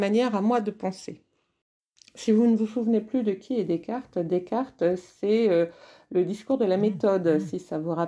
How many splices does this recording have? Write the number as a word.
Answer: zero